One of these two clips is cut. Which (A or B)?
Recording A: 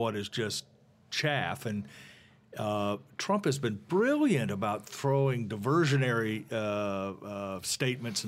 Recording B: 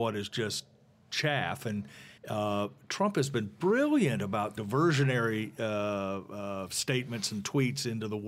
B